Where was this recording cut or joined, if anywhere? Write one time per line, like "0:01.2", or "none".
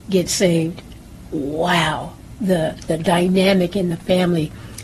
none